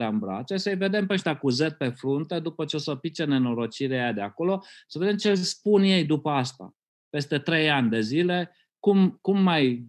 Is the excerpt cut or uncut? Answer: uncut